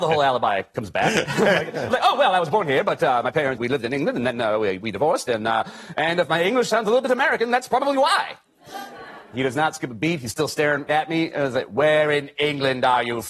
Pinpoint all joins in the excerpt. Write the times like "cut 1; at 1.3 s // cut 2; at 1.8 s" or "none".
cut 1; at 3.6 s // cut 2; at 10.9 s

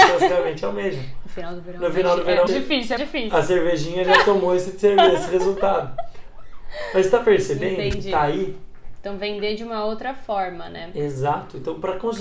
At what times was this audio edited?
cut 1; at 2.5 s // cut 2; at 3.0 s

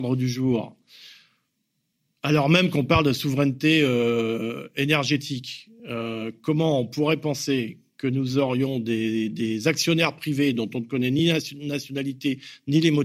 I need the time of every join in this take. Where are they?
none

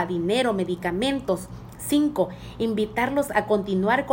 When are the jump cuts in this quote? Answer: none

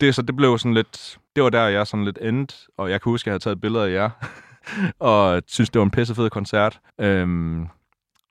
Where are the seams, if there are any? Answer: cut 1; at 1.3 s // cut 2; at 6.9 s

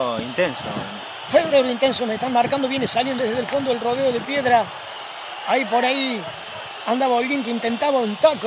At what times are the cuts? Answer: cut 1; at 3.2 s

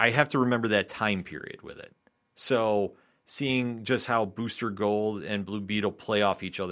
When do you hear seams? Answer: none

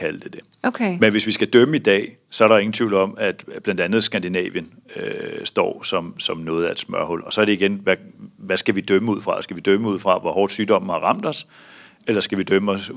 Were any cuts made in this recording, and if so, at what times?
none

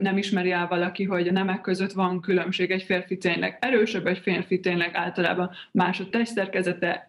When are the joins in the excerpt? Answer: none

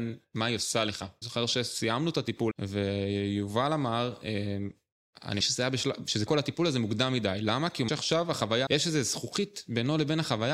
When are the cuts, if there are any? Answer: cut 1; at 1.2 s // cut 2; at 2.5 s // cut 3; at 5.4 s // cut 4; at 6.3 s // cut 5; at 7.9 s // cut 6; at 8.7 s

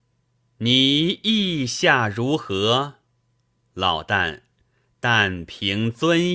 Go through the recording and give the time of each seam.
none

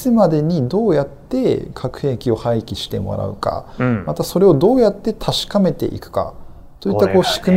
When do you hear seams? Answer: none

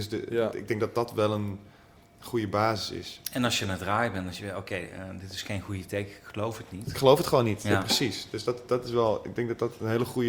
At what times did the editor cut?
none

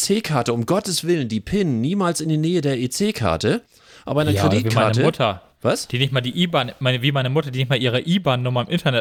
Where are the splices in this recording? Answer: none

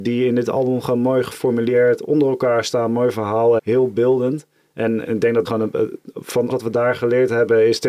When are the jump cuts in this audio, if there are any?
cut 1; at 3.6 s // cut 2; at 5.1 s // cut 3; at 5.5 s // cut 4; at 6.5 s

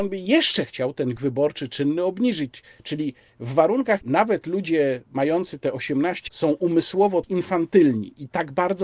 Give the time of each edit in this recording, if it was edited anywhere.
cut 1; at 1.2 s // cut 2; at 4.0 s // cut 3; at 6.3 s // cut 4; at 7.2 s

